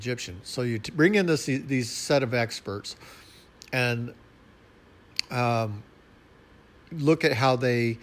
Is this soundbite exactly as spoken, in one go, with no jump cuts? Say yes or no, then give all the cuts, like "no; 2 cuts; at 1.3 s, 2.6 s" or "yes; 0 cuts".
yes; 0 cuts